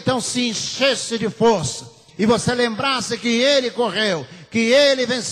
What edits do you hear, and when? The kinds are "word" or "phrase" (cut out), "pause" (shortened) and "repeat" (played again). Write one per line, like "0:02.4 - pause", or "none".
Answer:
none